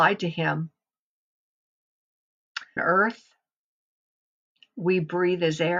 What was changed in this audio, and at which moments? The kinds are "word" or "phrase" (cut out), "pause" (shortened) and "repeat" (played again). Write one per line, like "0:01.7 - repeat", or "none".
0:02.8 - word